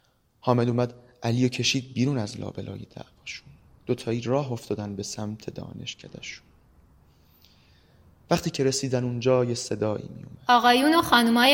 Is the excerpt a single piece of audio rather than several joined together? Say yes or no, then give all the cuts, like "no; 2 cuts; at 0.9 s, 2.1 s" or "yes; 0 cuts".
yes; 0 cuts